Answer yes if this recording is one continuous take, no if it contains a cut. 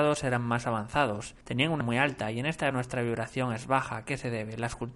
no